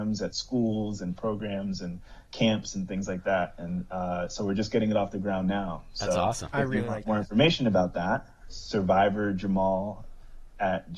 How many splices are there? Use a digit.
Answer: 0